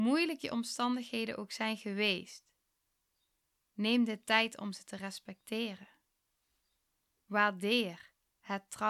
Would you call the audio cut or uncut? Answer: uncut